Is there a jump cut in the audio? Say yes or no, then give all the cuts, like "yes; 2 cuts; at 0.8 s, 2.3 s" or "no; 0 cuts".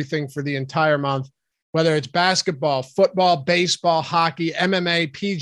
no; 0 cuts